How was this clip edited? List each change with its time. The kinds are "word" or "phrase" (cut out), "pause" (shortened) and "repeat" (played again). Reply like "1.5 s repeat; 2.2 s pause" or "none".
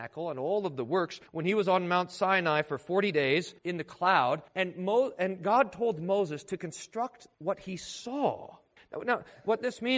1.3 s pause; 3.6 s pause; 4.5 s pause; 7.3 s pause; 8.8 s pause